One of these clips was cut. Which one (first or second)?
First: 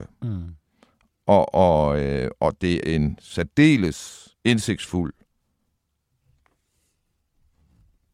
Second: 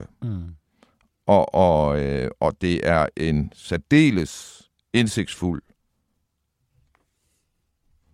first